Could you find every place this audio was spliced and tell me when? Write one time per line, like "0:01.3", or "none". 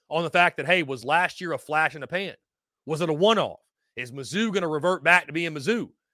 none